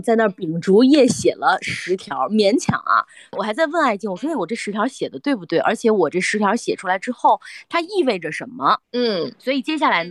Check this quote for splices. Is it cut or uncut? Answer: cut